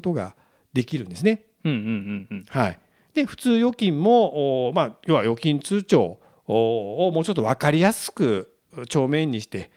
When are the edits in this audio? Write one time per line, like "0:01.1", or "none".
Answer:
none